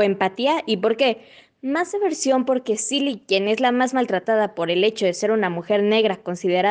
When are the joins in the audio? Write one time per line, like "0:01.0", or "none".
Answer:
none